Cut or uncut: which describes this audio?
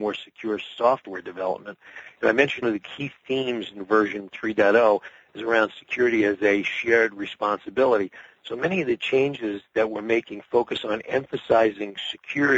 cut